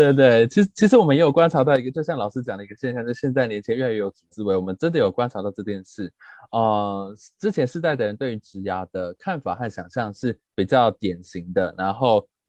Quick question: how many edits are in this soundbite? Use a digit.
1